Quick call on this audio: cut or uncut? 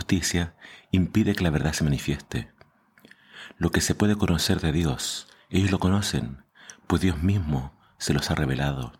uncut